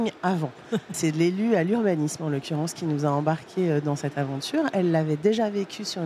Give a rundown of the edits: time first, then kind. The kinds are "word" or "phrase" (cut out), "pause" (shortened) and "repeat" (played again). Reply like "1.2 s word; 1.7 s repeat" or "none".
0.9 s word